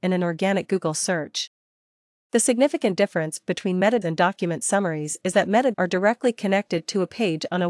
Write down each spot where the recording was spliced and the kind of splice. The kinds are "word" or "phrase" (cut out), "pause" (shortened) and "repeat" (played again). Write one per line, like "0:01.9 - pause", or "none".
0:04.0 - word
0:05.7 - word